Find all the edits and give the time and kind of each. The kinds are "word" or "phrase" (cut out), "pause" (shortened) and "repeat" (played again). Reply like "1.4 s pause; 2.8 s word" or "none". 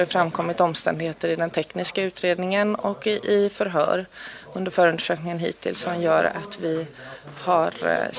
none